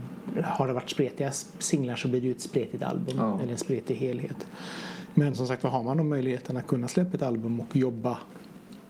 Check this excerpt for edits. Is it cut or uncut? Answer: uncut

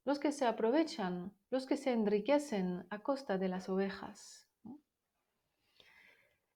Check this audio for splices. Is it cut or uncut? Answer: cut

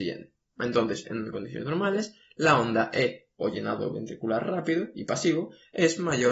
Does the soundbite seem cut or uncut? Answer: uncut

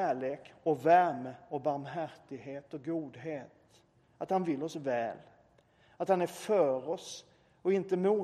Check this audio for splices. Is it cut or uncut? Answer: uncut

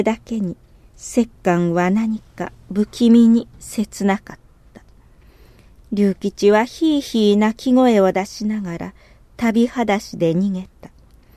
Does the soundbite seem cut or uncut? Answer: uncut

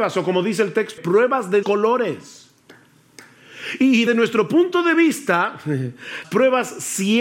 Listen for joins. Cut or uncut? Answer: cut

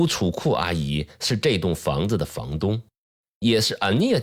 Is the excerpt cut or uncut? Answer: uncut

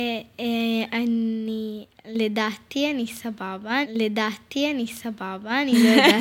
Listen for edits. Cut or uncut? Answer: cut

